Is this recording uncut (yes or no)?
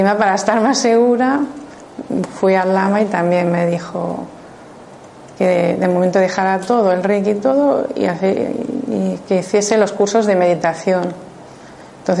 yes